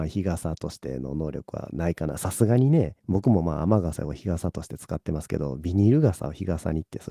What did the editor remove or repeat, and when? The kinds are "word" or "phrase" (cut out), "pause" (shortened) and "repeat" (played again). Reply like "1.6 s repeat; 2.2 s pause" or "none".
3.0 s pause